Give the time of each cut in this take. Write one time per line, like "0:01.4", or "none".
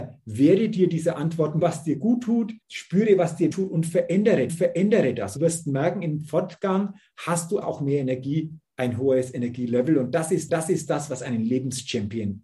0:01.6
0:02.6
0:03.5
0:04.5
0:05.4
0:07.6
0:10.5